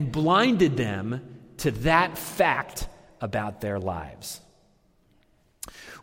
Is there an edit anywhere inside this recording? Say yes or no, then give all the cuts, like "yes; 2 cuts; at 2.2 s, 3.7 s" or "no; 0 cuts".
no; 0 cuts